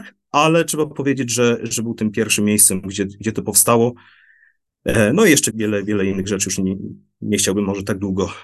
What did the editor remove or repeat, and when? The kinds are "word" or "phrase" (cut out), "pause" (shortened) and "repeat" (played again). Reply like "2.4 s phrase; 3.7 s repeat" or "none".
5.5 s word